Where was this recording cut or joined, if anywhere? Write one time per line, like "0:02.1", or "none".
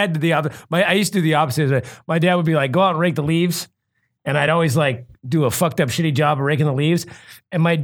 none